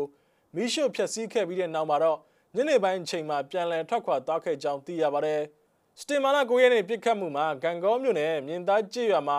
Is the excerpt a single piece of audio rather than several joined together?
yes; 0 cuts

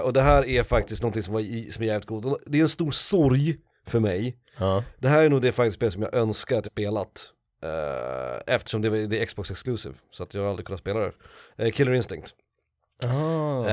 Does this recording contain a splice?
yes; 1 cut; at 6.6 s

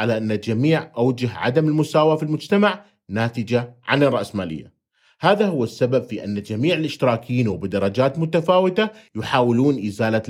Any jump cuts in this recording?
no; 0 cuts

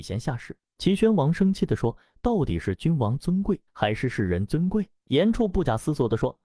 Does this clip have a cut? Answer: yes; 1 cut; at 3.7 s

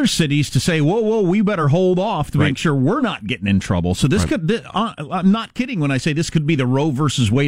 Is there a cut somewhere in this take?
no; 0 cuts

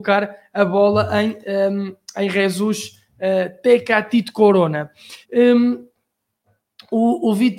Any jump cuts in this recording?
yes; 1 cut; at 5.2 s

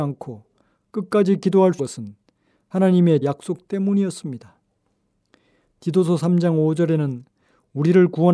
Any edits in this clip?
yes; 2 cuts; at 1.8 s, 3.2 s

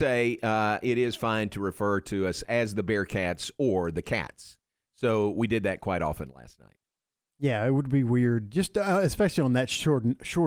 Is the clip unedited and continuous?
yes; 0 cuts

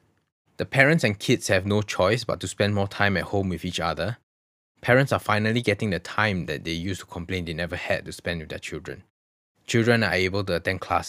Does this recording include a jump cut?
no; 0 cuts

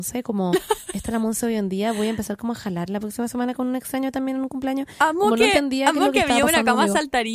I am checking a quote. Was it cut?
no; 0 cuts

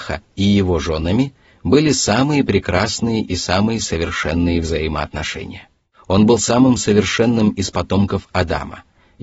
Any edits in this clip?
no; 0 cuts

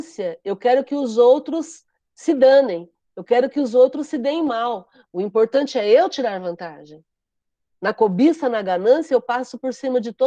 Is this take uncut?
yes; 0 cuts

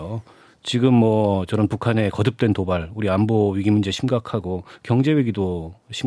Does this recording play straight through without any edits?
yes; 0 cuts

